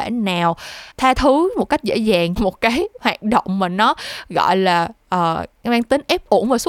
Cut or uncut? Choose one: cut